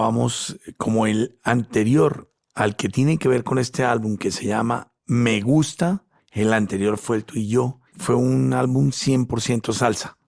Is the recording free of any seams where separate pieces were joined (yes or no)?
no